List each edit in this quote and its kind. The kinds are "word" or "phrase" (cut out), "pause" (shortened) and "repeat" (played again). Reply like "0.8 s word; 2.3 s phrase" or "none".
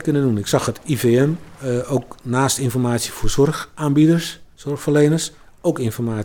4.5 s pause